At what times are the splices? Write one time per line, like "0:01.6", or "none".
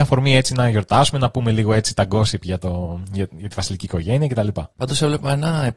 0:04.7